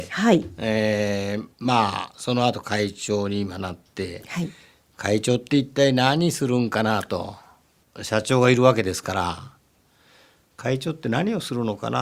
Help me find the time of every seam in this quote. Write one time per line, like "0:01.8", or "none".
0:01.5